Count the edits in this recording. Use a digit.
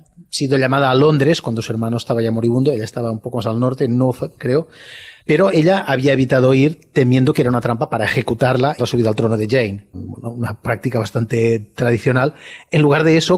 3